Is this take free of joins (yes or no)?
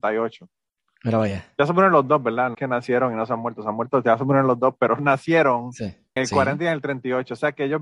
no